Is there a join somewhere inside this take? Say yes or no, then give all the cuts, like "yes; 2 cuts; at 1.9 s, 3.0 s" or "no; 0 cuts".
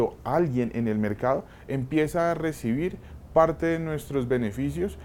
no; 0 cuts